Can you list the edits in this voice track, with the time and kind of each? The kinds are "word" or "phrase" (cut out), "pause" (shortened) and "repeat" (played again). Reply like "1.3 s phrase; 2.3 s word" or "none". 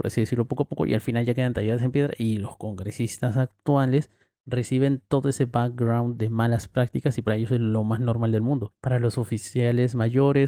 none